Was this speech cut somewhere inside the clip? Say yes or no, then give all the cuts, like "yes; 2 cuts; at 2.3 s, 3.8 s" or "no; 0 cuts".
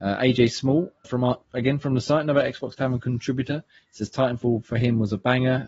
yes; 1 cut; at 1.0 s